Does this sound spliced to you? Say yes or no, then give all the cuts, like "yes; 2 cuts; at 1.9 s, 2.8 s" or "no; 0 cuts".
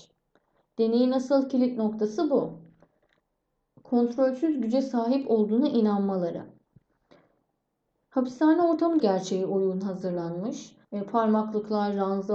yes; 2 cuts; at 9.0 s, 10.8 s